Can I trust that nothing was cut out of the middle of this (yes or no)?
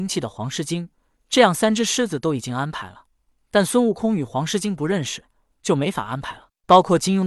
yes